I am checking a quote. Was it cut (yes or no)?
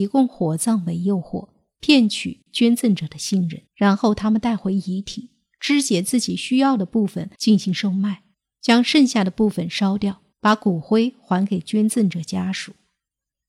yes